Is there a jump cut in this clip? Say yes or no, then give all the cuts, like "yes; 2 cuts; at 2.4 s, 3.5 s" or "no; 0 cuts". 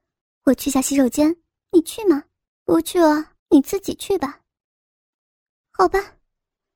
yes; 2 cuts; at 2.5 s, 3.4 s